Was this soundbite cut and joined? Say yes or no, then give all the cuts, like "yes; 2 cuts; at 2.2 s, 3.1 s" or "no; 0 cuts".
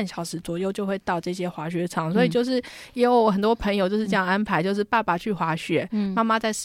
no; 0 cuts